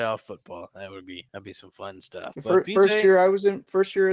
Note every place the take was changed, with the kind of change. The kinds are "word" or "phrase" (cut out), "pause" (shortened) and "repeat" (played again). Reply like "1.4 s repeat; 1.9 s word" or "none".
1.3 s pause